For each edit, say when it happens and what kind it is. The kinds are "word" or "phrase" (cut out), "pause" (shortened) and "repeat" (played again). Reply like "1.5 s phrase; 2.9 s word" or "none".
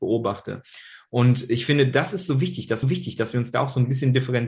2.8 s repeat